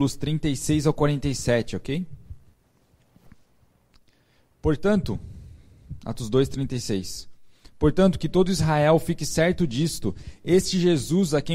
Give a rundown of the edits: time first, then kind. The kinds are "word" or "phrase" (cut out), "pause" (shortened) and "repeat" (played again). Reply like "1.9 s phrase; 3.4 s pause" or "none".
none